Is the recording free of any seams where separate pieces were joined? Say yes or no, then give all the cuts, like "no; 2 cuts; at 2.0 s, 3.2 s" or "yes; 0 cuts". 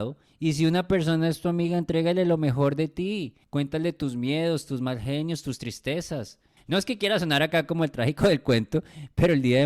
no; 2 cuts; at 3.4 s, 6.6 s